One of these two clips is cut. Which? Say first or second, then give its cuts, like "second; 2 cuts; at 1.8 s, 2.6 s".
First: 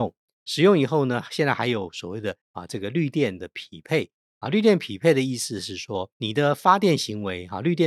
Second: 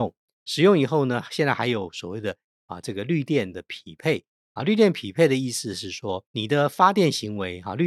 first; 1 cut; at 2.4 s